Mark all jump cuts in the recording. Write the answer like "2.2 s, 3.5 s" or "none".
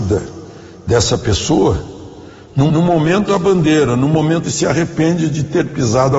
2.7 s, 3.3 s, 4.4 s